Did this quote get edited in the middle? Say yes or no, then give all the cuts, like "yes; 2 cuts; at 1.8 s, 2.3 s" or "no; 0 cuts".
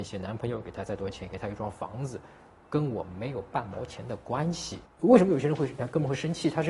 yes; 1 cut; at 4.9 s